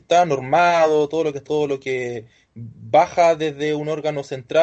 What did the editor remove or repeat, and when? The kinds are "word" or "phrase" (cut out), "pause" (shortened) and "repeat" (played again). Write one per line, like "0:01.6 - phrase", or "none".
0:01.5 - word